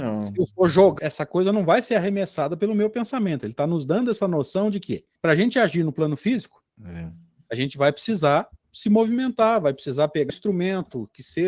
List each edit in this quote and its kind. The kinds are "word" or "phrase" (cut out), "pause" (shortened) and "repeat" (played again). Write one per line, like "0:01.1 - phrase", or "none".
0:01.0 - phrase
0:05.2 - pause
0:06.7 - pause
0:10.3 - word